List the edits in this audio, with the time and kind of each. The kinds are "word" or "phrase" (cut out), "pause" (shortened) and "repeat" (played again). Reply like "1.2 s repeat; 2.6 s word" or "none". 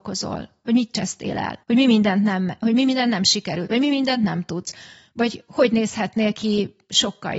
1.6 s pause